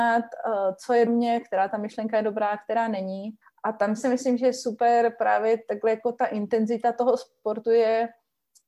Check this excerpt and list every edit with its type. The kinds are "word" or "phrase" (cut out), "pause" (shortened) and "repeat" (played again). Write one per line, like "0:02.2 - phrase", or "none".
0:01.1 - phrase
0:03.4 - pause
0:04.0 - word